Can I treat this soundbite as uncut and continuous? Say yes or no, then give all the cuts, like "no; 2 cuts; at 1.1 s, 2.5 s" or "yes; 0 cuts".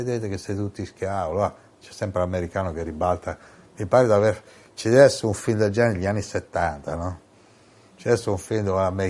yes; 0 cuts